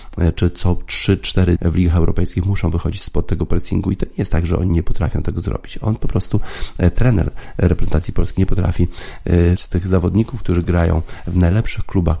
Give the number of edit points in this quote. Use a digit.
2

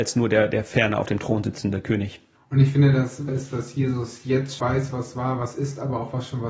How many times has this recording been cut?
2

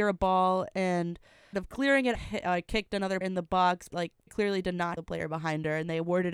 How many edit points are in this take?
6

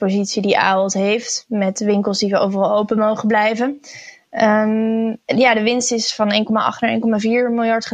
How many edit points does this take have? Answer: 1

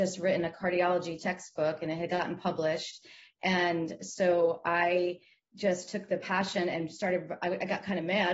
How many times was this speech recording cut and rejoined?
0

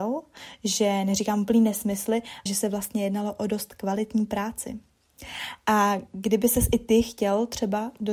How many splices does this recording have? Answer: 1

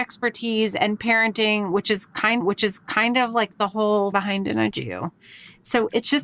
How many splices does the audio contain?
3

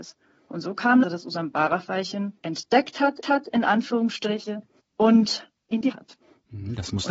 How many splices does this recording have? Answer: 5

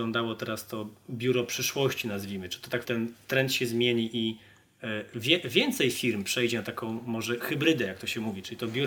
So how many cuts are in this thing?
1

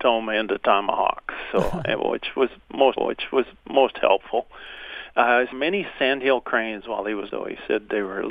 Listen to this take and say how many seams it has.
3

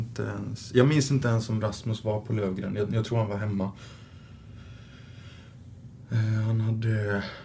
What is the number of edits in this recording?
0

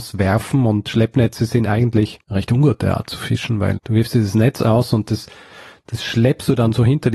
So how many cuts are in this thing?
2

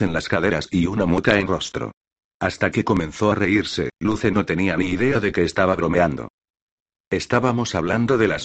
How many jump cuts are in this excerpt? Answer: 1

